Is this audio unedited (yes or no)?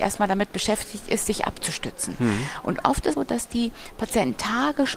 no